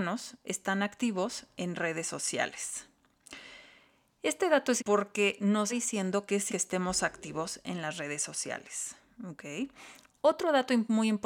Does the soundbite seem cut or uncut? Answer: cut